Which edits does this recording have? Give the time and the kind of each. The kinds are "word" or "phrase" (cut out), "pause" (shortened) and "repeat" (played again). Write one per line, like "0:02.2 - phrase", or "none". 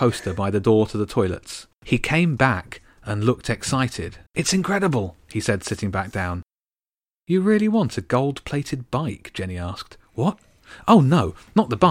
0:01.7 - pause
0:04.3 - pause

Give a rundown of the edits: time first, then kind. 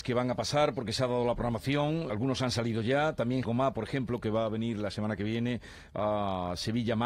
0:02.1 - word
0:03.4 - word

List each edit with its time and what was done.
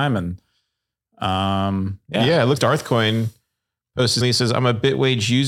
0:02.6 - word
0:04.2 - word

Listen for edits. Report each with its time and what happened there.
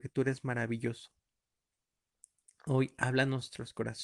none

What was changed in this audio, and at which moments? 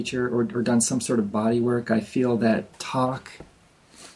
none

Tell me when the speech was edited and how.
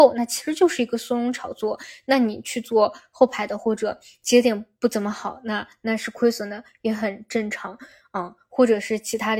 none

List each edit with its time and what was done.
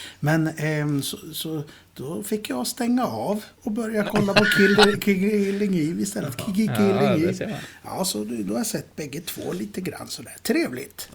0:03.5 - pause

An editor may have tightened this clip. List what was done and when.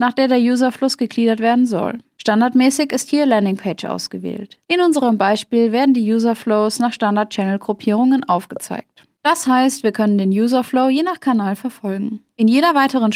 none

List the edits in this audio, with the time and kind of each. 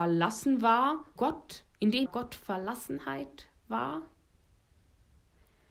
0:01.2 - word
0:01.7 - pause
0:02.1 - phrase

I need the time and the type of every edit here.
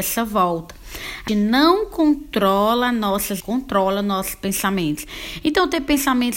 0:01.3 - word
0:03.4 - phrase

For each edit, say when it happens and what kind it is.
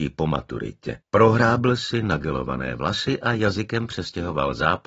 0:01.1 - pause

